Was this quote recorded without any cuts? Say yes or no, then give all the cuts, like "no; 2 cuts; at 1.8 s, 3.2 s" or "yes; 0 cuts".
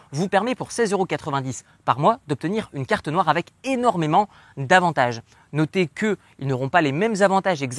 yes; 0 cuts